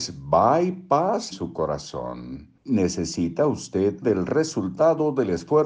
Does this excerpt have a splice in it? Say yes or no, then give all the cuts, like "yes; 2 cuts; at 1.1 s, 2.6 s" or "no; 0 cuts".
yes; 3 cuts; at 1.3 s, 2.6 s, 4.0 s